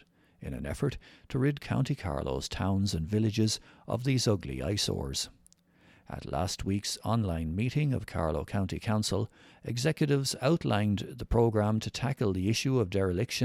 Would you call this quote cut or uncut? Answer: uncut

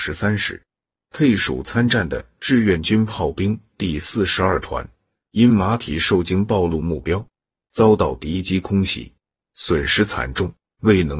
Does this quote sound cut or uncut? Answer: uncut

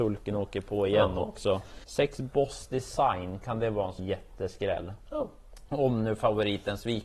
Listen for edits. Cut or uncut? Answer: cut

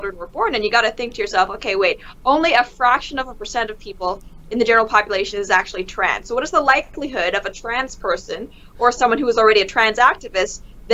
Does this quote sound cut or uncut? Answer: uncut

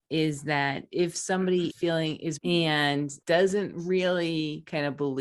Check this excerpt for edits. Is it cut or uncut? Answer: cut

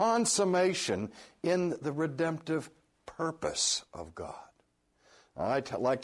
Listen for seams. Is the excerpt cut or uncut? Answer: uncut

